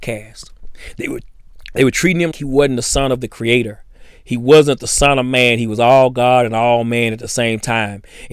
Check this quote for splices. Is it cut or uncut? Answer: cut